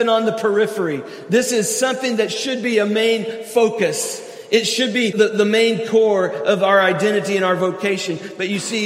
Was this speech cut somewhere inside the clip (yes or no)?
yes